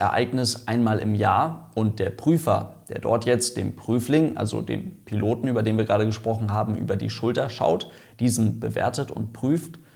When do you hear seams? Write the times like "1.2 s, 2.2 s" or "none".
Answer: none